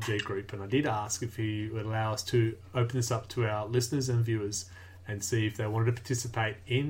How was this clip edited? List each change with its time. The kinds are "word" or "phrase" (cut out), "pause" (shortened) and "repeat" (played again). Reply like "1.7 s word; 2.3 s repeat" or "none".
none